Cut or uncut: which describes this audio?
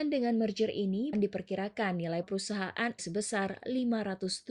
cut